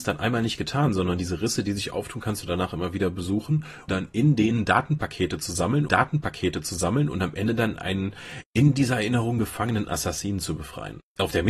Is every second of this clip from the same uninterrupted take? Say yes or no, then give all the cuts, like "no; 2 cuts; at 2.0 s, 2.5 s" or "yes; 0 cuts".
no; 3 cuts; at 3.9 s, 5.9 s, 9.9 s